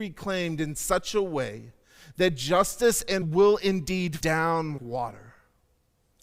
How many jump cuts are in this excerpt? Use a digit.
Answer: 3